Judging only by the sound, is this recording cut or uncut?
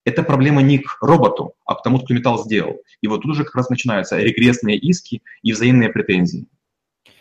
uncut